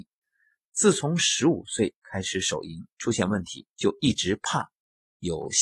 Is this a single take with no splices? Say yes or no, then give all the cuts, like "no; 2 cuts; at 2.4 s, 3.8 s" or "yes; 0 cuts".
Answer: no; 1 cut; at 3.7 s